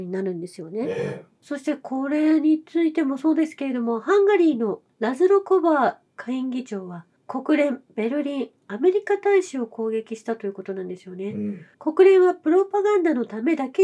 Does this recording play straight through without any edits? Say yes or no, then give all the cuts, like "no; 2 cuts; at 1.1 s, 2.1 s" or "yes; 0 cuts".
no; 1 cut; at 11.7 s